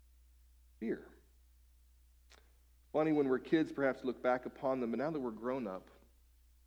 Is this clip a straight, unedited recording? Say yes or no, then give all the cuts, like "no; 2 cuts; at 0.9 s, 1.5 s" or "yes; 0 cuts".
yes; 0 cuts